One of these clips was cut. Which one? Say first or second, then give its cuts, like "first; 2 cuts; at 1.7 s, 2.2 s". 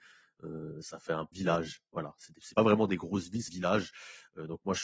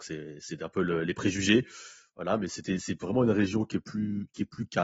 first; 3 cuts; at 1.3 s, 2.5 s, 3.5 s